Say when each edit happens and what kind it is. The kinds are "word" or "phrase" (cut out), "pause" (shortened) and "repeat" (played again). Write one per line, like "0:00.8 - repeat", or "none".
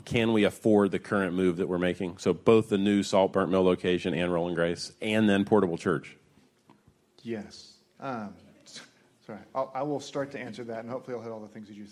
0:03.3 - phrase

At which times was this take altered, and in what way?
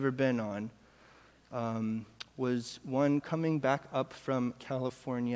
none

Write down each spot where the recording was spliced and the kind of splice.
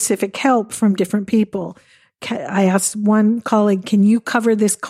none

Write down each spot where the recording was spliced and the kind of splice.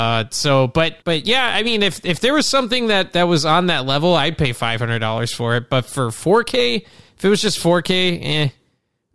0:01.0 - pause

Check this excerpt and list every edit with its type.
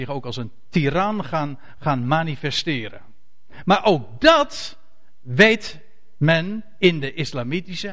none

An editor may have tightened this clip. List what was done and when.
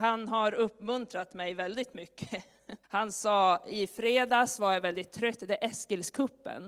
0:02.8 - pause

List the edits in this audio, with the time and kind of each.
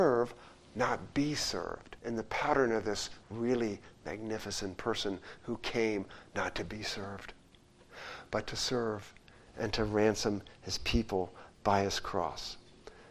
0:02.0 - pause
0:03.2 - pause

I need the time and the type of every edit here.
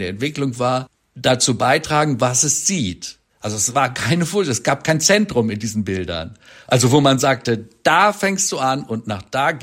none

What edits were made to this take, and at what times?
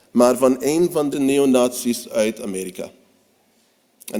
0:01.1 - phrase

